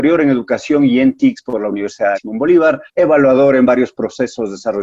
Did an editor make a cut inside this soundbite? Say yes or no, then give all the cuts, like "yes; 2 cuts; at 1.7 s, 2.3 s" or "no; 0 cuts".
yes; 2 cuts; at 2.1 s, 2.9 s